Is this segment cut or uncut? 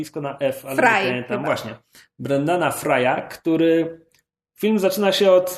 uncut